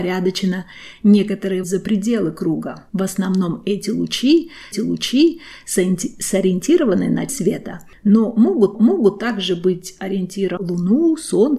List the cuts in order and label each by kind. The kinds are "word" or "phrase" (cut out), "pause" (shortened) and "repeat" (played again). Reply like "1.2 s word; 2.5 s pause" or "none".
1.6 s word; 2.9 s pause; 4.7 s repeat; 7.3 s word; 8.7 s repeat; 10.6 s word